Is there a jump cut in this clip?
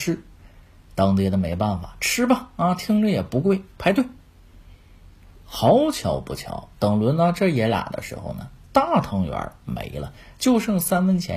no; 0 cuts

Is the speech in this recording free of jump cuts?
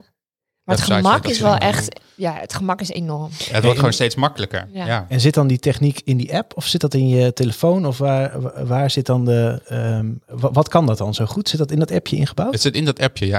yes; 0 cuts

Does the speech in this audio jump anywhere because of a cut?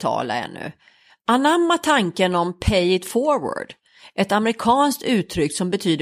no; 0 cuts

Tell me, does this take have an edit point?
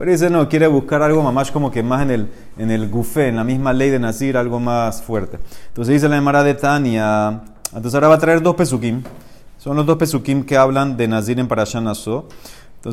no; 0 cuts

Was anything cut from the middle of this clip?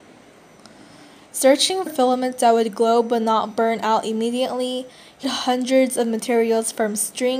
yes; 2 cuts; at 1.9 s, 5.2 s

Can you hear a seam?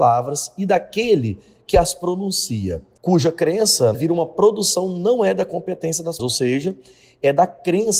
yes; 2 cuts; at 3.9 s, 6.2 s

